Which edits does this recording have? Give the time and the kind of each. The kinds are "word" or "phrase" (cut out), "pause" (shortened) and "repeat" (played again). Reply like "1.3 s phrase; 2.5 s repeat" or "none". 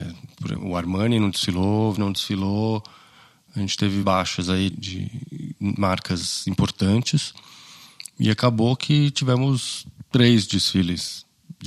1.9 s word; 4.0 s word; 4.7 s word